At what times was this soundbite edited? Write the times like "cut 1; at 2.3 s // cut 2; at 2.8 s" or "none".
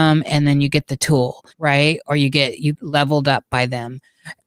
cut 1; at 1.5 s // cut 2; at 2.7 s